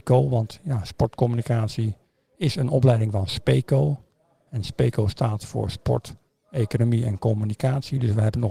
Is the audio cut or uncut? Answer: uncut